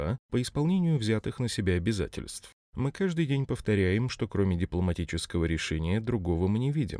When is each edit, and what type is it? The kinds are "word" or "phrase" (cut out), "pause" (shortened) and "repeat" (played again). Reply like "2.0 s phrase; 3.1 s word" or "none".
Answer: none